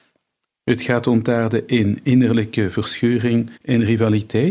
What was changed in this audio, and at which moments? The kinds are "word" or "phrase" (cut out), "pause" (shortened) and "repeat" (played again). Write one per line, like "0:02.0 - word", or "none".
0:03.6 - pause